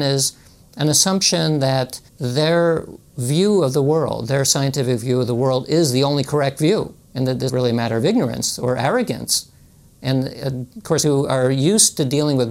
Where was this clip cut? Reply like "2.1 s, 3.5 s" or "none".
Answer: 2.1 s, 7.0 s, 7.5 s, 10.7 s, 11.0 s